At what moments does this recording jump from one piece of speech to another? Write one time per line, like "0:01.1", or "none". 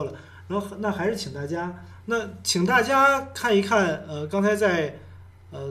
none